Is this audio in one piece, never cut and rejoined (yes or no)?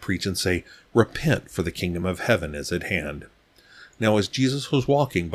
yes